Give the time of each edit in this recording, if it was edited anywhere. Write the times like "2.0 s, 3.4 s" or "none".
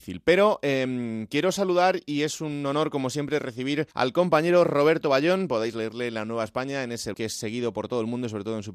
3.9 s, 7.1 s

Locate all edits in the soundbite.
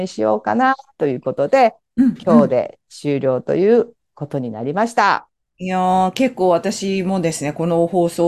none

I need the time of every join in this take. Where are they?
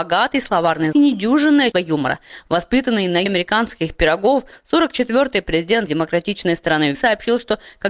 0.9 s, 1.7 s, 3.3 s, 5.9 s, 6.9 s

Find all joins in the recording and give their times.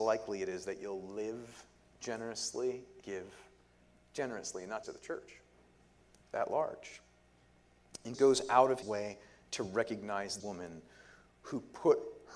3.0 s, 4.8 s, 8.1 s, 8.8 s, 10.4 s

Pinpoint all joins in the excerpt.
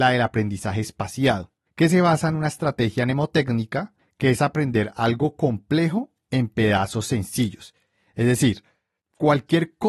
none

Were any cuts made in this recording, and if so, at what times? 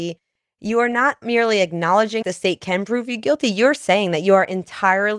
1.2 s, 2.2 s

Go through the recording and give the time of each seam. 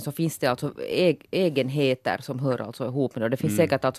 none

